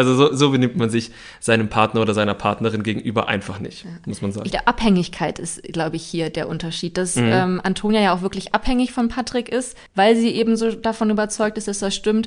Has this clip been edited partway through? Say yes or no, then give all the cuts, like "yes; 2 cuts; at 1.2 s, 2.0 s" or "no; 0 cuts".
yes; 1 cut; at 9.9 s